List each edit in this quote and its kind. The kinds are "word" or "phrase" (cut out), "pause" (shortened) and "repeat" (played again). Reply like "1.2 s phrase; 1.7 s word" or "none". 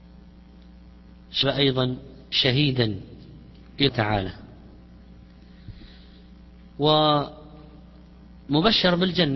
1.4 s word; 3.9 s word